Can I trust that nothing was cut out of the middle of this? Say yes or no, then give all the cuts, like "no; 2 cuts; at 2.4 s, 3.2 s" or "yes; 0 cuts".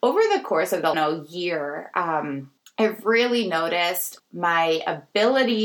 no; 3 cuts; at 0.9 s, 2.6 s, 4.2 s